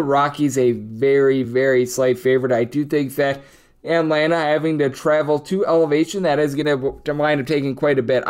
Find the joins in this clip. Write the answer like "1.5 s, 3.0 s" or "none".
none